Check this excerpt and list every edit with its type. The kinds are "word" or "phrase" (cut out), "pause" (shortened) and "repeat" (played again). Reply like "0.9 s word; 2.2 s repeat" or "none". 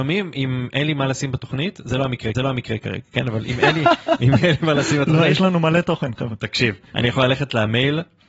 2.3 s repeat